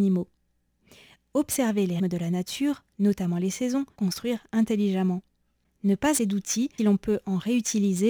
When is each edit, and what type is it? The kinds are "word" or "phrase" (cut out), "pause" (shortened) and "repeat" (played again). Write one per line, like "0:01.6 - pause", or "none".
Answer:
0:02.0 - word
0:04.0 - word
0:06.2 - word
0:06.8 - word